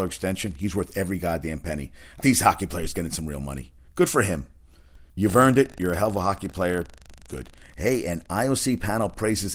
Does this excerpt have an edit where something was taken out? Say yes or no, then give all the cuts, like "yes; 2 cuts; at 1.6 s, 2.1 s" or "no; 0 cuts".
yes; 2 cuts; at 2.2 s, 5.1 s